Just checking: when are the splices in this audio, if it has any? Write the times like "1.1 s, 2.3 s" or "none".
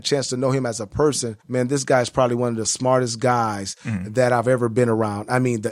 1.4 s